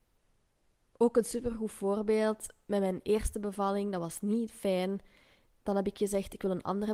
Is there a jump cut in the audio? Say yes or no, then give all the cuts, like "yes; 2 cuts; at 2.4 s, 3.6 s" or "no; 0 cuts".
no; 0 cuts